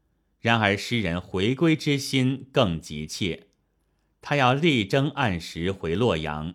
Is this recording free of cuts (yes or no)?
yes